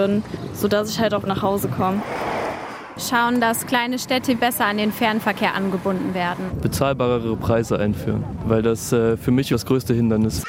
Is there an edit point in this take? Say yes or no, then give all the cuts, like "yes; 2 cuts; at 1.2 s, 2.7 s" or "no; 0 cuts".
yes; 2 cuts; at 1.3 s, 9.5 s